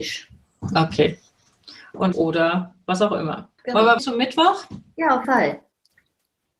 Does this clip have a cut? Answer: yes; 4 cuts; at 2.1 s, 3.6 s, 4.0 s, 5.2 s

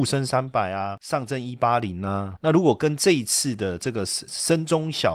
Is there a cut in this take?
yes; 1 cut; at 2.4 s

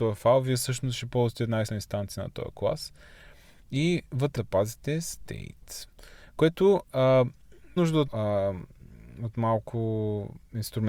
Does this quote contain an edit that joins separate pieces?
yes; 4 cuts; at 1.7 s, 4.4 s, 7.8 s, 8.1 s

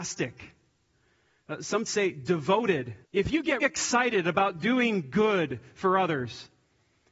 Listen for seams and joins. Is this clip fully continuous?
no; 3 cuts; at 1.9 s, 3.0 s, 3.6 s

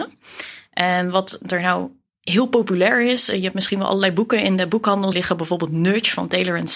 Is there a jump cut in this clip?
yes; 1 cut; at 5.1 s

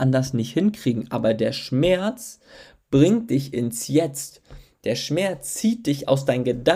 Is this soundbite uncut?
yes; 0 cuts

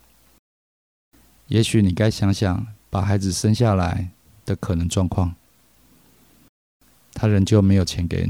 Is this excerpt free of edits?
yes; 0 cuts

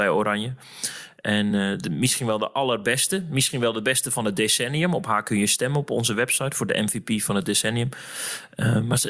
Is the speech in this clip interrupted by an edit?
no; 0 cuts

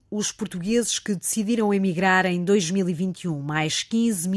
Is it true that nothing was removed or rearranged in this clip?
yes; 0 cuts

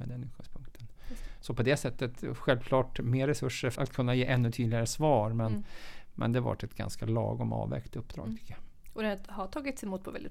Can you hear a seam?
yes; 1 cut; at 3.8 s

